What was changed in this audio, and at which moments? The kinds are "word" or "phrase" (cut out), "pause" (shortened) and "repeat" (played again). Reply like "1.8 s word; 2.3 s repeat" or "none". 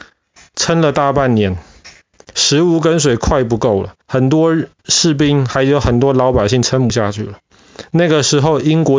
4.0 s pause

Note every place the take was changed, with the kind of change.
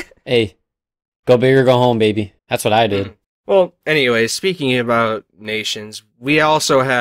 2.4 s pause; 3.2 s pause

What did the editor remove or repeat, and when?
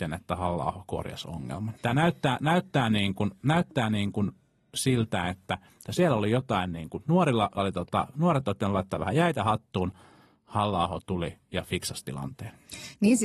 7.6 s word

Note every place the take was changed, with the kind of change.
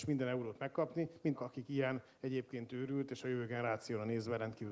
1.4 s word

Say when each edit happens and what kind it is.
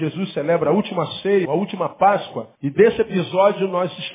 1.4 s word; 2.5 s pause

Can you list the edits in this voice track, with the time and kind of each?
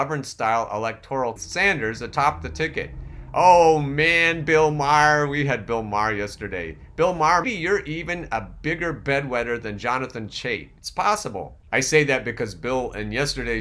1.4 s phrase; 7.4 s word; 11.6 s pause

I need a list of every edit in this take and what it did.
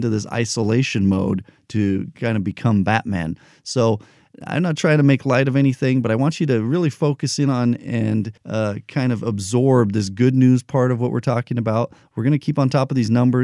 8.4 s pause

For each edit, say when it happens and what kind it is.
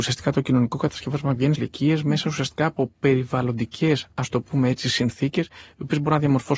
1.6 s phrase

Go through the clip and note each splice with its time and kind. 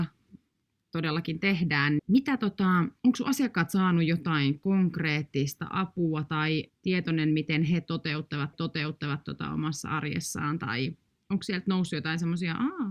2.0 s word; 3.0 s pause; 6.7 s word; 8.5 s repeat

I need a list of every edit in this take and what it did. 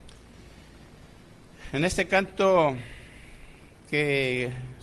none

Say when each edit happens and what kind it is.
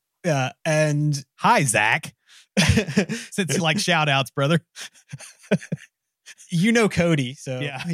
none

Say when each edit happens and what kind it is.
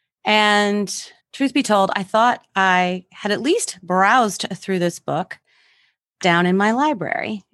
1.2 s pause; 6.2 s phrase

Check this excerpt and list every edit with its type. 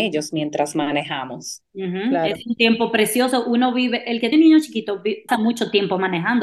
1.7 s pause; 4.3 s word; 5.3 s word

